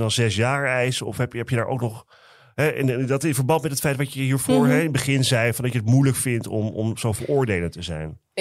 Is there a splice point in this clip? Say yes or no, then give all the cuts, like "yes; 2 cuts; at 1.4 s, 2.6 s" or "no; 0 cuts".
no; 0 cuts